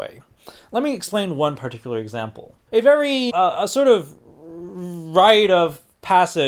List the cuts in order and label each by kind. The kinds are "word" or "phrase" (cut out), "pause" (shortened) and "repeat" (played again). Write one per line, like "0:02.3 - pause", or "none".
0:02.7 - word
0:03.3 - word